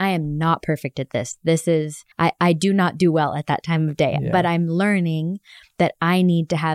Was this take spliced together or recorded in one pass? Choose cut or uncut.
cut